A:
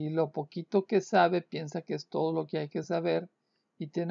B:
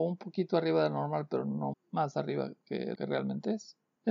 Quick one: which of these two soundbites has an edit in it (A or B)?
B